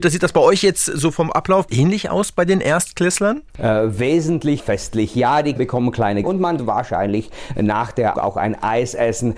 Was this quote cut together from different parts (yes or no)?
yes